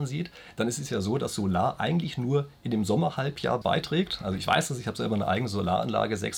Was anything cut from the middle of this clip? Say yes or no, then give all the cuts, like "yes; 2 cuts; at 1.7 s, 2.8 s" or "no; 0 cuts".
yes; 1 cut; at 3.6 s